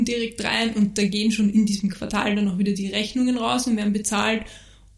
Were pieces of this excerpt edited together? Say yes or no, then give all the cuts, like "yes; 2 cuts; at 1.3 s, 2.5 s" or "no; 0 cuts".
no; 0 cuts